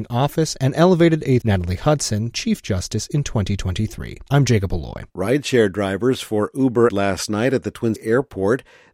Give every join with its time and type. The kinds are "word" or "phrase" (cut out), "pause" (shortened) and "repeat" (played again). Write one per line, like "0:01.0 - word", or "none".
0:01.4 - word
0:02.3 - word
0:04.3 - pause
0:05.1 - pause
0:06.9 - phrase
0:08.0 - word